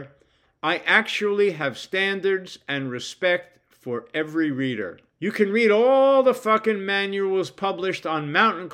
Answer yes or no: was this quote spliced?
yes